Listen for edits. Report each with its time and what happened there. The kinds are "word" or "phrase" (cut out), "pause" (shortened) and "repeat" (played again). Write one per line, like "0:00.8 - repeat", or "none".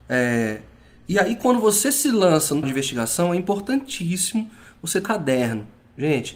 0:02.6 - word
0:05.0 - word

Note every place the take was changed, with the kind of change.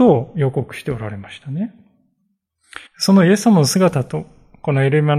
0:02.9 - pause

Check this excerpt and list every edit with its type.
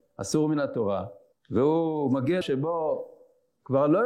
0:01.3 - pause
0:02.4 - word

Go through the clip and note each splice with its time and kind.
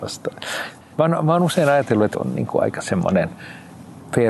0:02.1 - word

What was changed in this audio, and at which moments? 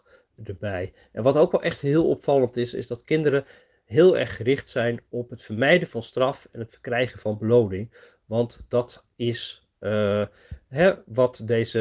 none

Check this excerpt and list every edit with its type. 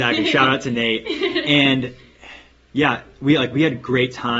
none

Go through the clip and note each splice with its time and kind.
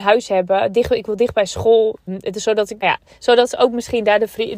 0:02.1 - word
0:02.8 - word

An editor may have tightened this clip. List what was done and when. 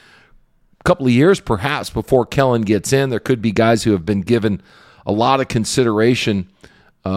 none

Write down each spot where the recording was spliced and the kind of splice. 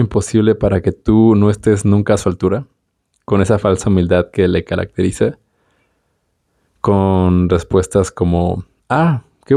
none

